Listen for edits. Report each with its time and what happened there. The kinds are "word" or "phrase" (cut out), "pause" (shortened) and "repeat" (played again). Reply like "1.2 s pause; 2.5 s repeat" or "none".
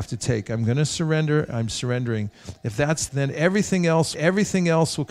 3.1 s word; 4.1 s repeat

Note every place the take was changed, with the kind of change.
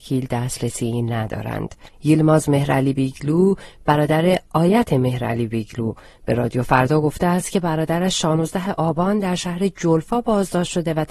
none

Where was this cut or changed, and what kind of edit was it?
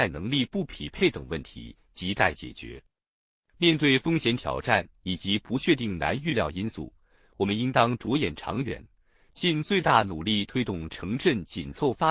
none

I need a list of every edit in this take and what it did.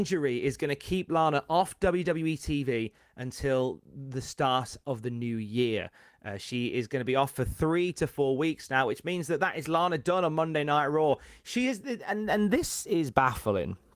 none

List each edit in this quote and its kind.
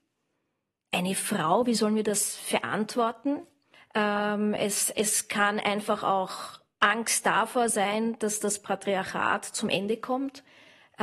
3.7 s pause

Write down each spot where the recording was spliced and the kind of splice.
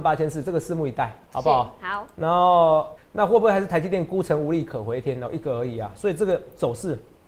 3.0 s word

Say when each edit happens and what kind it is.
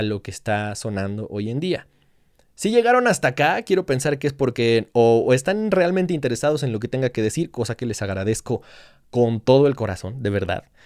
none

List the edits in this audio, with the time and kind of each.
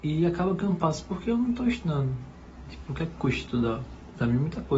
none

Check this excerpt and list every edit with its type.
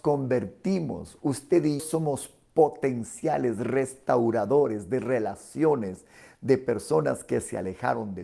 1.8 s word

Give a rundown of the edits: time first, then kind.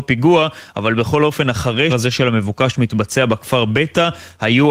1.9 s word

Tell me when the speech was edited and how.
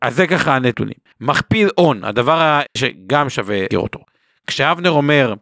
1.1 s pause; 2.8 s word; 3.7 s word

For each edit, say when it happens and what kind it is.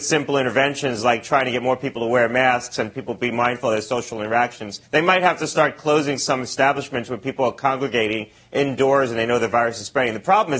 4.9 s pause

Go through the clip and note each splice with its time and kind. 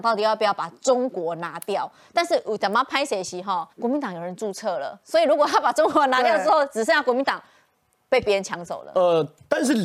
3.7 s pause

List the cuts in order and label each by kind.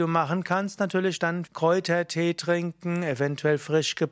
1.5 s word

